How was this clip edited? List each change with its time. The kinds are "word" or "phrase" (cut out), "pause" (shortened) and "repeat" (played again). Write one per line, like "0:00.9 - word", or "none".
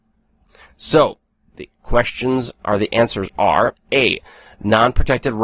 none